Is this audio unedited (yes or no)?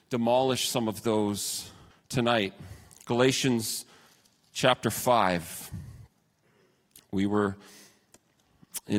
no